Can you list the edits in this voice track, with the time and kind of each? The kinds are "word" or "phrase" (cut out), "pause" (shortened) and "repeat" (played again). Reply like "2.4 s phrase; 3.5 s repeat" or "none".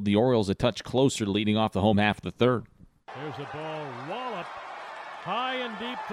none

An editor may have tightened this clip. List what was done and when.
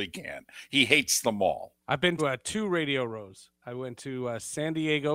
1.8 s pause; 2.2 s word

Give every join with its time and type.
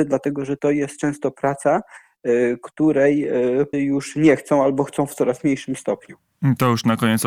3.7 s word

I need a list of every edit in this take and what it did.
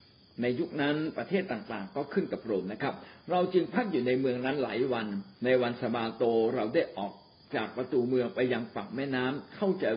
5.3 s pause

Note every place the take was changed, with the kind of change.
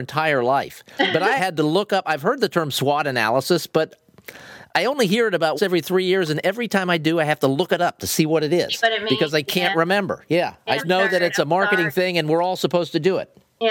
1.4 s word; 5.6 s word; 10.8 s word

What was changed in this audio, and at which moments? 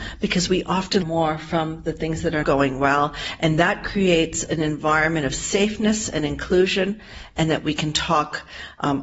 1.0 s word; 2.4 s word

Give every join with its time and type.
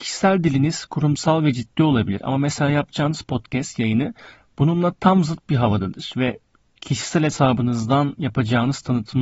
none

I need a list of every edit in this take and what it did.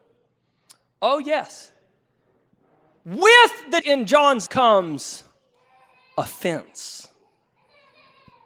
3.8 s word; 4.5 s word

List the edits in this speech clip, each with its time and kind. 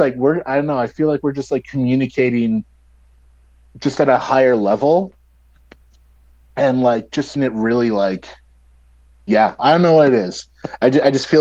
7.4 s word; 9.6 s phrase

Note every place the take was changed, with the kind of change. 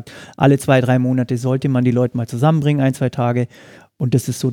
none

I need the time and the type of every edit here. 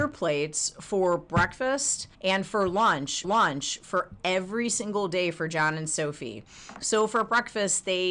2.1 s pause; 3.2 s repeat

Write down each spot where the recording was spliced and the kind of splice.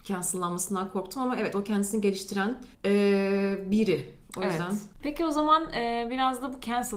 2.7 s pause

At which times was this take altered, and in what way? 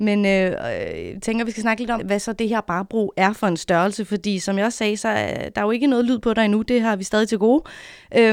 2.0 s word

